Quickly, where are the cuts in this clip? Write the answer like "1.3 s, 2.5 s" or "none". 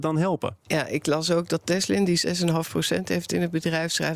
none